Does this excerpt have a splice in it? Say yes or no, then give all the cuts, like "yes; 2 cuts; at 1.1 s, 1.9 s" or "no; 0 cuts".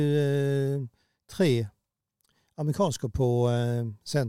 no; 0 cuts